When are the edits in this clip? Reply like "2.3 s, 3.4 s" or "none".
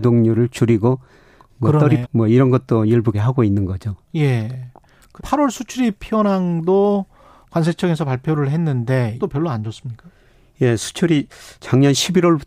2.0 s, 3.1 s, 5.2 s, 9.2 s